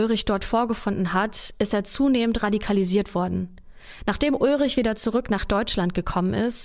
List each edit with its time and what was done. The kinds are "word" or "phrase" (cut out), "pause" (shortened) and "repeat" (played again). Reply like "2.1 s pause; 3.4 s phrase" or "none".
none